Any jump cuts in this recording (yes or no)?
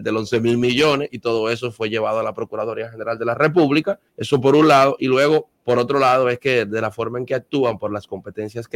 yes